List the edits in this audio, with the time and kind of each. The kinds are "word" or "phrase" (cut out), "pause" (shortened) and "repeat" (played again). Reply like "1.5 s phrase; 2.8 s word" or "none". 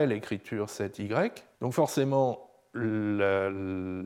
1.5 s pause